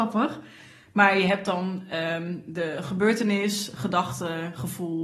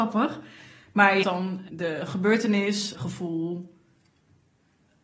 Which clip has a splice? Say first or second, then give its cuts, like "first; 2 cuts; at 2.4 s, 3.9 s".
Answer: second; 3 cuts; at 1.2 s, 1.7 s, 2.9 s